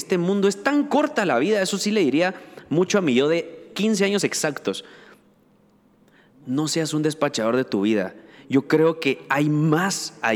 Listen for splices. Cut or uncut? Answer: uncut